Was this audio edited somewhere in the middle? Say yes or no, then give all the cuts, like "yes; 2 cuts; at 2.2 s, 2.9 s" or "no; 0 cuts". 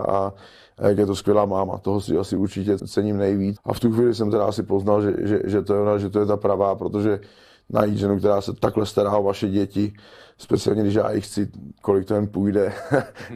yes; 3 cuts; at 2.8 s, 3.6 s, 5.2 s